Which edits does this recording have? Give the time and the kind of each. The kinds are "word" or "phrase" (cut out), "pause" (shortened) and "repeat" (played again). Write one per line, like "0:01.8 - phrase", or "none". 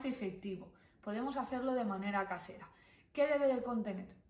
none